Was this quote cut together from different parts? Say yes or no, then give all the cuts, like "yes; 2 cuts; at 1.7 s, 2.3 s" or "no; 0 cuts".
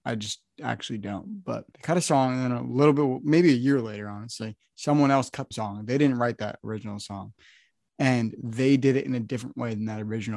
yes; 2 cuts; at 1.7 s, 5.5 s